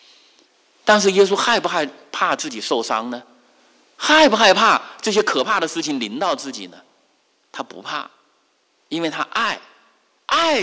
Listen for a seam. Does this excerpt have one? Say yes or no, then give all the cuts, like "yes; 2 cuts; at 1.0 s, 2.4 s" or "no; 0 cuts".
no; 0 cuts